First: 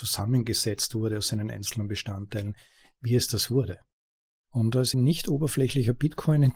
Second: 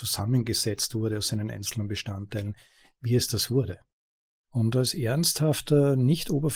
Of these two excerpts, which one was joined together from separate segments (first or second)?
first